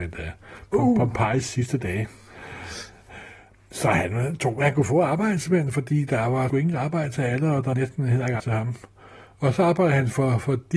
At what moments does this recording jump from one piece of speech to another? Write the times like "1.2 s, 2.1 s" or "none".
6.5 s, 7.7 s, 8.4 s